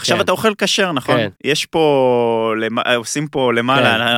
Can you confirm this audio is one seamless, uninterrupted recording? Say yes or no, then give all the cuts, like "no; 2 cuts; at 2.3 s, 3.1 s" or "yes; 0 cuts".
no; 1 cut; at 1.4 s